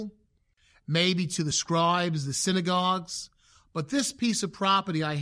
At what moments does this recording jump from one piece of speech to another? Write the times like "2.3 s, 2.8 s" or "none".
none